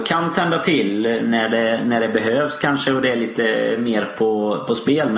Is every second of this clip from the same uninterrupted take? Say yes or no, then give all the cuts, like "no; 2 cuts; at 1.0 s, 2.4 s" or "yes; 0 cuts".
yes; 0 cuts